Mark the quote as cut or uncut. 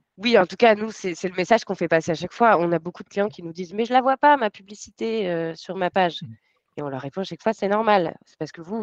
uncut